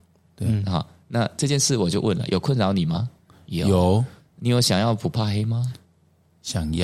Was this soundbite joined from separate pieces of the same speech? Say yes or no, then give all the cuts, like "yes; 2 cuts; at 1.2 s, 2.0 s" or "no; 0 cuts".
no; 0 cuts